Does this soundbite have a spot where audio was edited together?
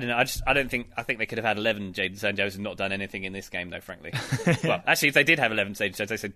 no; 0 cuts

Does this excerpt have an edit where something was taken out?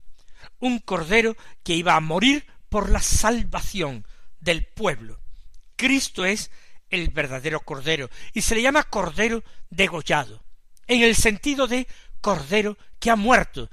no; 0 cuts

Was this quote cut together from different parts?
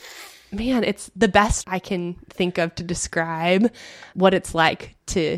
yes; 2 cuts; at 1.6 s, 4.1 s

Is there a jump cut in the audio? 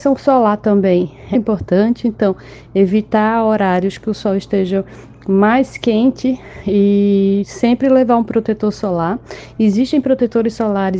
yes; 1 cut; at 1.3 s

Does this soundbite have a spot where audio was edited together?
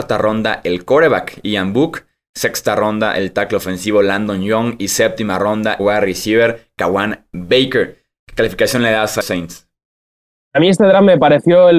yes; 2 cuts; at 5.8 s, 9.2 s

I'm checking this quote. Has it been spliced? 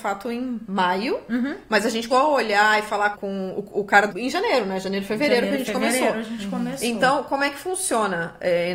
yes; 3 cuts; at 2.1 s, 3.1 s, 4.1 s

